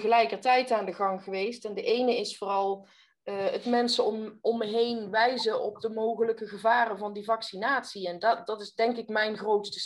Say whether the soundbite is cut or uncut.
uncut